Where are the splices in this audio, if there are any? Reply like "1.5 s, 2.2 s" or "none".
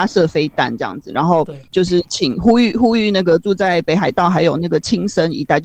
1.7 s